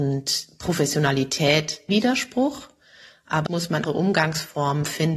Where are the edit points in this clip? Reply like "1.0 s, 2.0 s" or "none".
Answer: 1.9 s, 3.5 s, 3.8 s